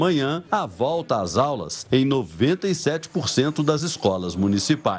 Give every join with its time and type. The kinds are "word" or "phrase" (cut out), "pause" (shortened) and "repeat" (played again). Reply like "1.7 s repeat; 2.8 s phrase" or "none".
none